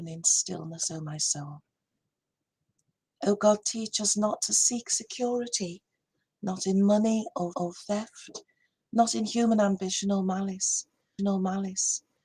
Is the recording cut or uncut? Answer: cut